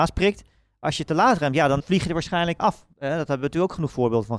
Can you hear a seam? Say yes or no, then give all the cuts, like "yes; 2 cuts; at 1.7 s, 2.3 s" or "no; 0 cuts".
yes; 3 cuts; at 1.8 s, 2.6 s, 2.9 s